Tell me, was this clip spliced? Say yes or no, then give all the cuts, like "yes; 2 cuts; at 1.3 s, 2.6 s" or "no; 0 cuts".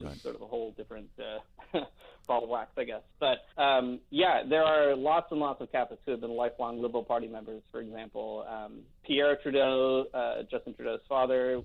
yes; 1 cut; at 3.5 s